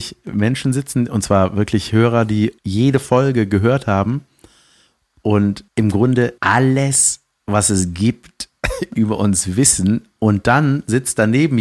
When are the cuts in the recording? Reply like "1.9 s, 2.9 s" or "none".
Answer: 2.6 s, 5.7 s, 6.4 s